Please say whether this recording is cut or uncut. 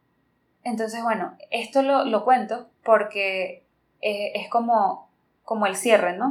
uncut